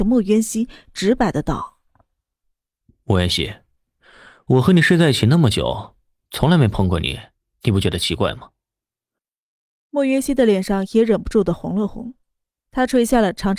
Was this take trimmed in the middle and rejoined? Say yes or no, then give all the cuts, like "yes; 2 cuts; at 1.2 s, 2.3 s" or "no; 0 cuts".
no; 0 cuts